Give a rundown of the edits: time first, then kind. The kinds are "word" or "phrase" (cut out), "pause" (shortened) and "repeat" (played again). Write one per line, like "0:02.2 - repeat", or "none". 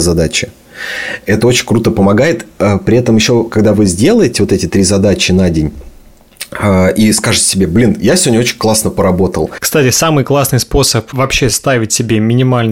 none

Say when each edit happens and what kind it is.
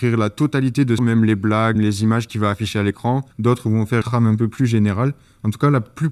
0:01.0 - phrase
0:01.8 - word
0:03.3 - pause
0:04.0 - word

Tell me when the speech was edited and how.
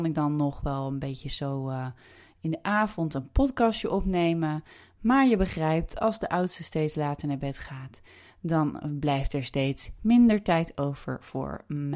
none

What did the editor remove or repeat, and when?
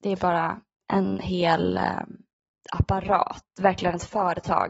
0:02.5 - pause

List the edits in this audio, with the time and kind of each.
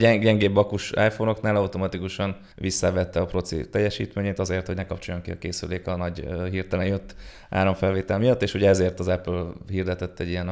0:02.5 - pause

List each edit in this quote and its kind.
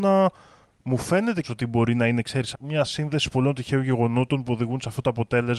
0:01.4 - word
0:02.5 - word

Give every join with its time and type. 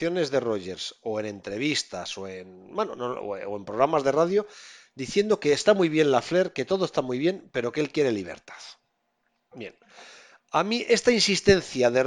none

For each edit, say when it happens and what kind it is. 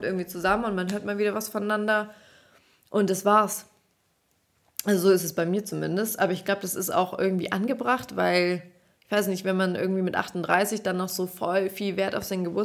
none

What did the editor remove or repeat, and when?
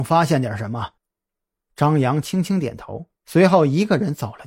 0:01.0 - pause
0:03.2 - pause

